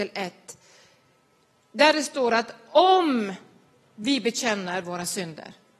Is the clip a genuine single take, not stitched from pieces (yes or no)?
yes